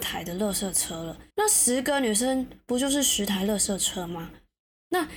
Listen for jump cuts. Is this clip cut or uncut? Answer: cut